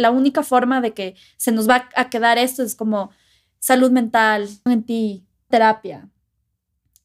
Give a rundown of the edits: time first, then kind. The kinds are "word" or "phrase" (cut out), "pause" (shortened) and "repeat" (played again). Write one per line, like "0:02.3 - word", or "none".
0:04.7 - word
0:05.5 - word